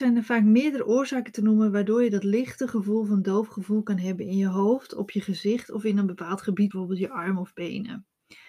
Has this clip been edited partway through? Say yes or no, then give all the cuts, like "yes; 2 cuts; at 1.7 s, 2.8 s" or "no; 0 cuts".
yes; 1 cut; at 6.7 s